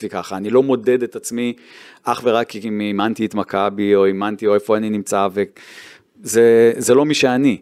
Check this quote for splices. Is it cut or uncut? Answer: uncut